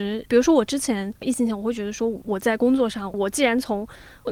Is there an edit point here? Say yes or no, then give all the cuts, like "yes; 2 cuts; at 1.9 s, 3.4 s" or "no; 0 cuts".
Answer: yes; 1 cut; at 1.1 s